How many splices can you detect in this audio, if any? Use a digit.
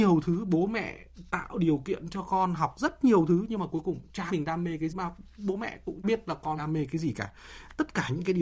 4